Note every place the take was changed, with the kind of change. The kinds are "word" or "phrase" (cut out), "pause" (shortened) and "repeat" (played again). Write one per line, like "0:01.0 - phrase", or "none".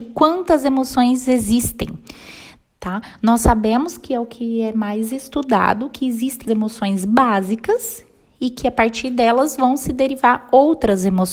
0:06.5 - word